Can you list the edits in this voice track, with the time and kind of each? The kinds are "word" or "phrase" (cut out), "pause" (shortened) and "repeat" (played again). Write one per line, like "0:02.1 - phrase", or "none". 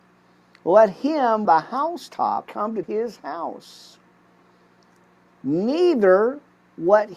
0:01.5 - phrase
0:02.5 - word
0:02.8 - phrase